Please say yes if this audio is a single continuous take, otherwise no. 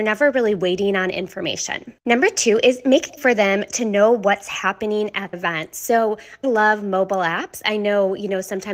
no